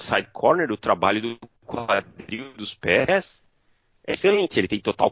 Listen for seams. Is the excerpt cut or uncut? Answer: cut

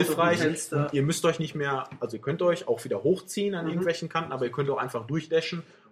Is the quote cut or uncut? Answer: uncut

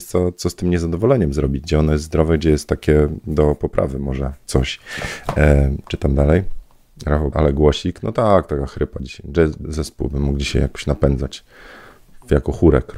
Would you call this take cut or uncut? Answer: cut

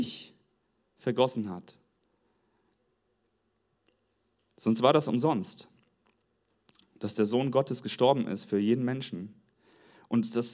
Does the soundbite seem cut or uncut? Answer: uncut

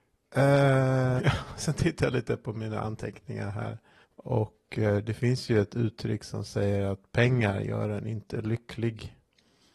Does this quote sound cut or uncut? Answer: cut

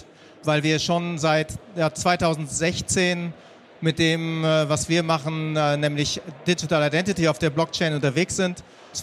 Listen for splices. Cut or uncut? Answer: uncut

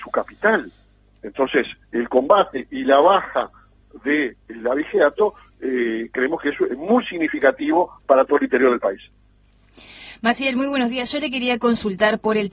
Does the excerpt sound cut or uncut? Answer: uncut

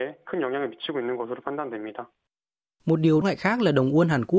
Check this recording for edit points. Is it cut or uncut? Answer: cut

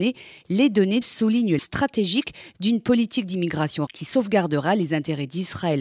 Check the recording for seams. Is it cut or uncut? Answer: cut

